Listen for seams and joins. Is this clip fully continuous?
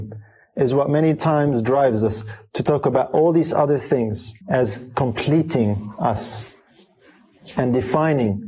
no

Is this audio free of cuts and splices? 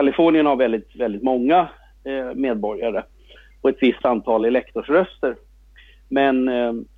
yes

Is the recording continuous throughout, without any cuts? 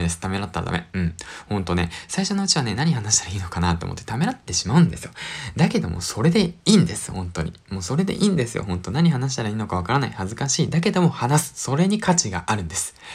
yes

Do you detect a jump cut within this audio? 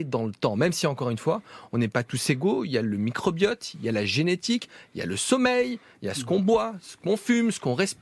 no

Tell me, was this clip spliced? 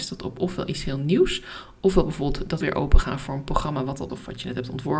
yes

